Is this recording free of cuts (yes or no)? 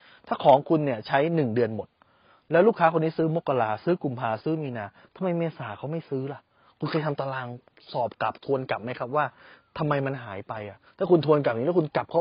yes